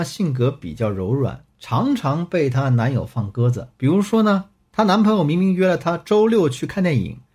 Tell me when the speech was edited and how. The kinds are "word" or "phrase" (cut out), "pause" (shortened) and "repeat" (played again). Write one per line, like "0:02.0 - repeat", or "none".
0:03.7 - pause